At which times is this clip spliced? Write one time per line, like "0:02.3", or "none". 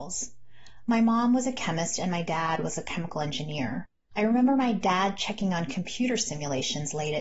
none

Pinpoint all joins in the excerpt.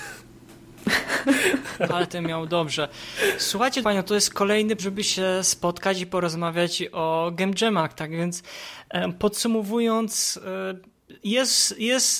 0:01.9
0:03.8
0:04.8

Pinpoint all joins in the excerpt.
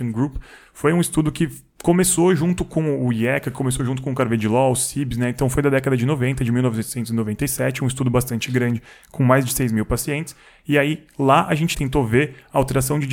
0:11.7

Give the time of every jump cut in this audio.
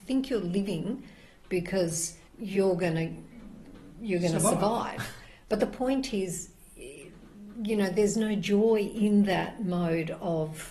0:02.3

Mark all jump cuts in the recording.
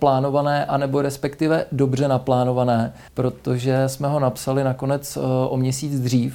0:03.1

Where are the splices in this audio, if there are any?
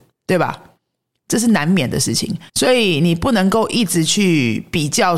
0:02.5

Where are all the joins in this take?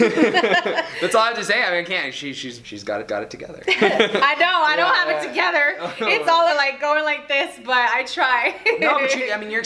0:02.6
0:03.1
0:06.5

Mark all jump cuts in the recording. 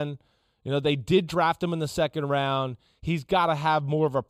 none

